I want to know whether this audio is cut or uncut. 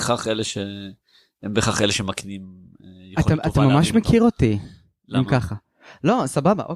uncut